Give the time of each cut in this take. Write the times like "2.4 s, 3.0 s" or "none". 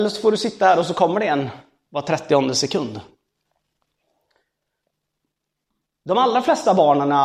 none